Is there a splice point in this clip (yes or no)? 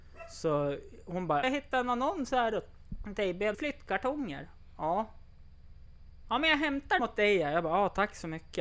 yes